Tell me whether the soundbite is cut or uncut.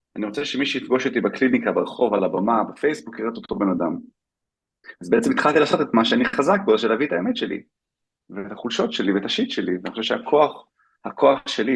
uncut